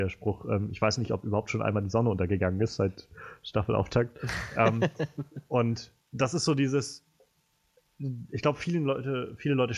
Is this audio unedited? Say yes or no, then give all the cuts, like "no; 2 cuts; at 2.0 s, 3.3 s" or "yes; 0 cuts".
no; 1 cut; at 6.0 s